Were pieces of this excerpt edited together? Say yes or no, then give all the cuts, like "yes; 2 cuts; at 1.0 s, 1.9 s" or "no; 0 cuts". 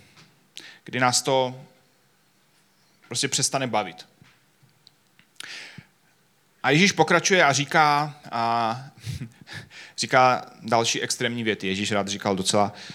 no; 0 cuts